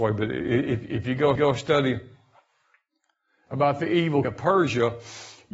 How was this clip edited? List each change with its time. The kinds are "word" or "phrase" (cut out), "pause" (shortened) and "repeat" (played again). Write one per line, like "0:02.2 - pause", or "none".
0:01.4 - repeat
0:04.2 - word